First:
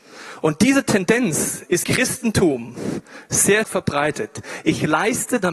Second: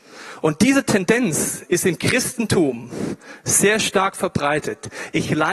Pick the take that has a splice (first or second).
first